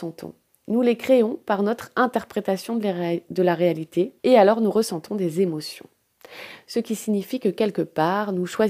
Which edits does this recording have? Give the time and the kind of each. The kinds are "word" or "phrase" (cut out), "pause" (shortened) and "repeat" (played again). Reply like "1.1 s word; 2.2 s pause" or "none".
4.2 s pause